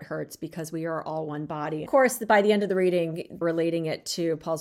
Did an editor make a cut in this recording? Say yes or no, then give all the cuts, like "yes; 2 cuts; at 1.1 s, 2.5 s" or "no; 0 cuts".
yes; 2 cuts; at 1.9 s, 3.4 s